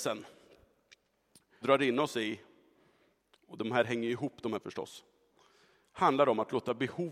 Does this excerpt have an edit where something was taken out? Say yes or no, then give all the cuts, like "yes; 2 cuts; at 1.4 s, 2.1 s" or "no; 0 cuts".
yes; 2 cuts; at 1.6 s, 4.6 s